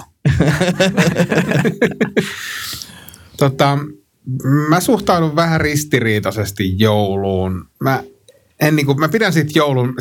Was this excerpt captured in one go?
no; 1 cut; at 7.7 s

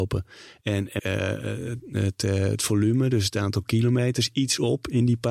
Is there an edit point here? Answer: yes; 1 cut; at 1.0 s

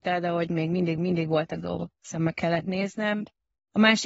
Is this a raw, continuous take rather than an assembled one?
no; 2 cuts; at 1.0 s, 1.9 s

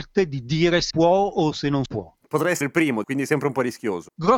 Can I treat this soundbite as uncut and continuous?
no; 4 cuts; at 0.9 s, 1.9 s, 2.6 s, 3.0 s

